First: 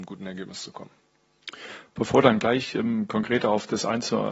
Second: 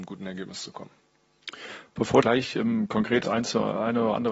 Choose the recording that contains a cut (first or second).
second